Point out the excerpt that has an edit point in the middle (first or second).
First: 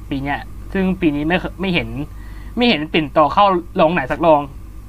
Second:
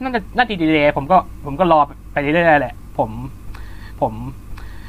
second